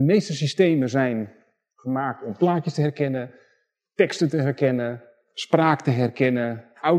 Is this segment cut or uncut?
uncut